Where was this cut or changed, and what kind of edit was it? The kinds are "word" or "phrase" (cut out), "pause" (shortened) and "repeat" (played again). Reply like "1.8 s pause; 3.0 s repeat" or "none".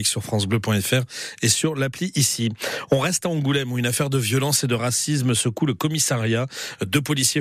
none